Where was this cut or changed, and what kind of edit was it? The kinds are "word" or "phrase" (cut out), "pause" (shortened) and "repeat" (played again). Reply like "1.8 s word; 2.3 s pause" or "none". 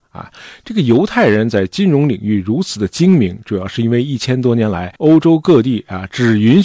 5.0 s pause